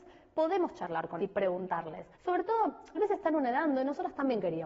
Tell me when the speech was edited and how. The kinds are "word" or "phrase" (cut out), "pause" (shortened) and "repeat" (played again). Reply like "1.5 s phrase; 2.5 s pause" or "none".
1.2 s word; 2.1 s pause; 3.0 s word